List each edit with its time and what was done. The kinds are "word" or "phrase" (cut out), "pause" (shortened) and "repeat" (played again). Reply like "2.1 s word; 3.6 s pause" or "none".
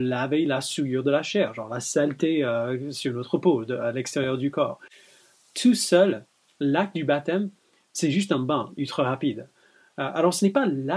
none